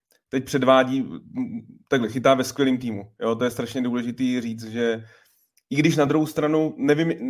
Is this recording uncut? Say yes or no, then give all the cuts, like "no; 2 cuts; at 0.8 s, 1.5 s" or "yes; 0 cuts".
yes; 0 cuts